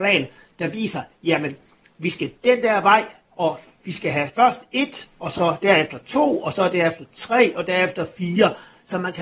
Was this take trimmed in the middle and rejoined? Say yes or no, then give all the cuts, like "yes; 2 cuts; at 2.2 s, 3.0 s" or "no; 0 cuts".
no; 0 cuts